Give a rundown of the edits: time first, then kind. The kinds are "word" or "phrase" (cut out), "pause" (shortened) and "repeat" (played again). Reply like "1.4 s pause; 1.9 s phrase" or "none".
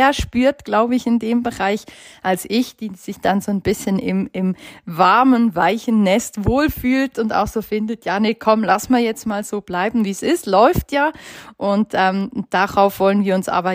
none